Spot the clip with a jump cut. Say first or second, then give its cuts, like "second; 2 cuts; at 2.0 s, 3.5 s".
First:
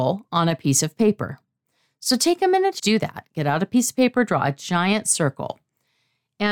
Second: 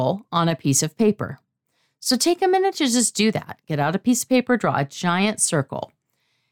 first; 1 cut; at 2.8 s